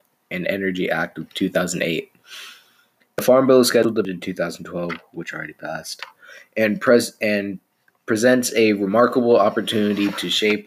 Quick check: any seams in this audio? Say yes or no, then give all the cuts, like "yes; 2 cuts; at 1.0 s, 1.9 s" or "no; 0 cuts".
yes; 1 cut; at 4.0 s